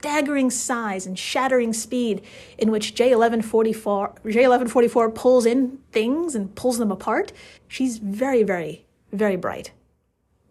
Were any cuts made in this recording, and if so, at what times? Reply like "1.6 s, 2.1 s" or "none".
7.6 s

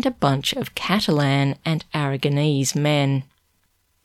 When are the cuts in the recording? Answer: none

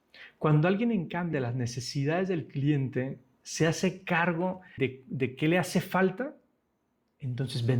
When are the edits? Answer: 1.3 s, 4.8 s

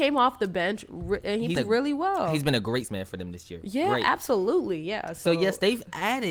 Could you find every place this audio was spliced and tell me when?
1.6 s, 2.9 s

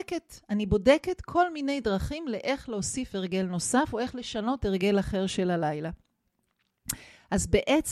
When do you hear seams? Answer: none

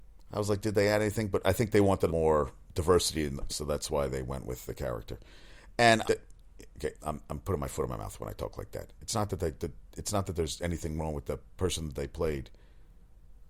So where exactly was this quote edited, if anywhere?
2.1 s, 3.5 s, 6.0 s, 7.0 s

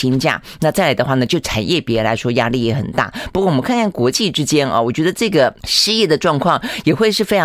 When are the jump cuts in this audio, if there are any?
5.6 s

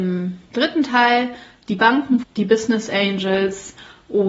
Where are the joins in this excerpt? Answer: 2.2 s

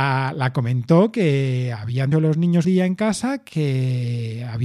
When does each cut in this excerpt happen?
2.1 s, 2.6 s

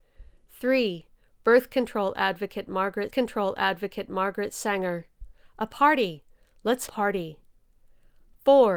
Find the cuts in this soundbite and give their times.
3.1 s, 6.9 s

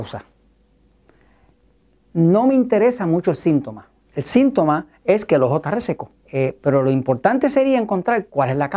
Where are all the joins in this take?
6.2 s

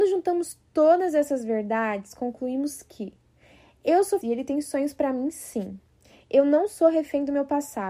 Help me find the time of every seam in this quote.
4.2 s

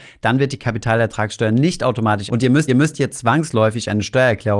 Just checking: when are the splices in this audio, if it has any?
2.3 s, 2.7 s

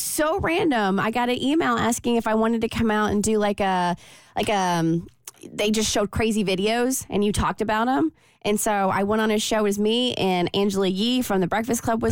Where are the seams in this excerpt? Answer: none

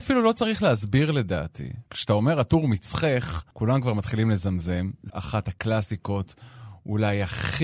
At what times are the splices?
1.9 s, 3.5 s, 5.1 s

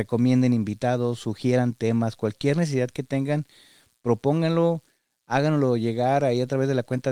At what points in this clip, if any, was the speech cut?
none

